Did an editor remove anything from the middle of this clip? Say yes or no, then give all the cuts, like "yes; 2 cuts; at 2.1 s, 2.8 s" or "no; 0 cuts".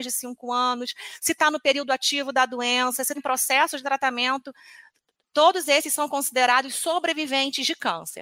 yes; 1 cut; at 3.1 s